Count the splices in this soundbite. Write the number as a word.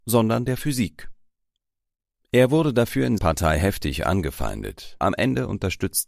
two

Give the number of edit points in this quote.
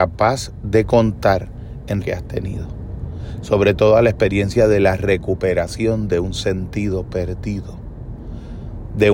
one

